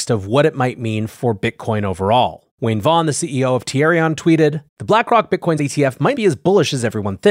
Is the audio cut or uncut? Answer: cut